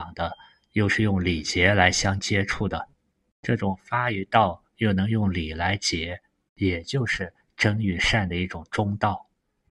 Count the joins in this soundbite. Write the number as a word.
zero